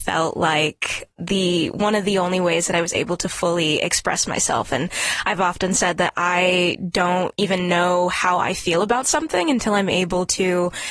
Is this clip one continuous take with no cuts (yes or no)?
yes